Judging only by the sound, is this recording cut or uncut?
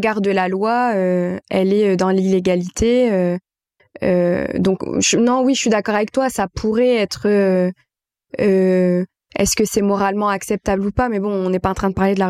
uncut